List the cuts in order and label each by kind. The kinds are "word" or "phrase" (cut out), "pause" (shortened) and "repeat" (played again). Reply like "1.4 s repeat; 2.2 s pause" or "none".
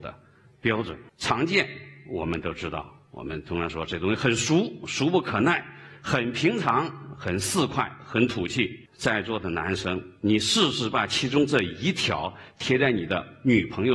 1.1 s pause; 8.9 s pause